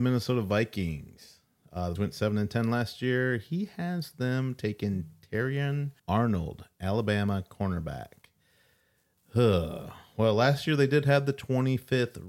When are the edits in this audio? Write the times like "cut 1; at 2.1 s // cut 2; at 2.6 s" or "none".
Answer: cut 1; at 2.0 s // cut 2; at 6.0 s